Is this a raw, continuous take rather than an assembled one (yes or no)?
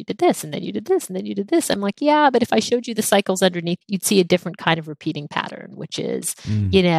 no